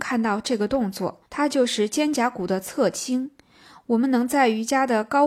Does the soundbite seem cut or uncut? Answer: cut